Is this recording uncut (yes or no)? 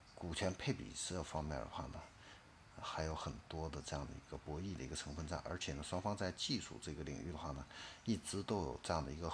no